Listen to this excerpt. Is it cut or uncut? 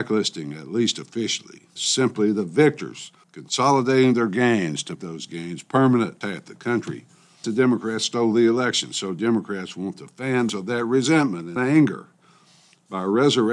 cut